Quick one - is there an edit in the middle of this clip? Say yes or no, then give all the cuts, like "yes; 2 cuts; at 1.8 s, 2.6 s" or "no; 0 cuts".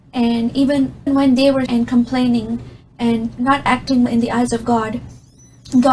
yes; 3 cuts; at 1.1 s, 1.7 s, 4.1 s